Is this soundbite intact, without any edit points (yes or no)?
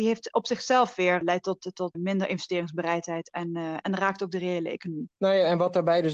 no